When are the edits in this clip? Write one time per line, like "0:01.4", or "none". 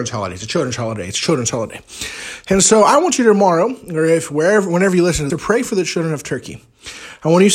0:05.3